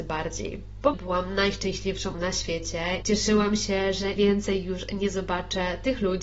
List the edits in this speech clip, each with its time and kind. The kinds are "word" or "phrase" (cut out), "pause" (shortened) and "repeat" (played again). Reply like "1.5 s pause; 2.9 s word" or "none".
0.9 s word; 2.1 s word; 3.0 s word; 4.2 s word